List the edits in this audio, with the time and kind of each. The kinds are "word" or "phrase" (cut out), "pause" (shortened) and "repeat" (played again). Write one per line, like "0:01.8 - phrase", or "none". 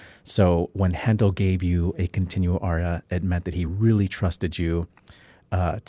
none